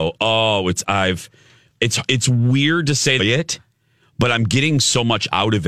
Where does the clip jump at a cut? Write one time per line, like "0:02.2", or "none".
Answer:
0:03.2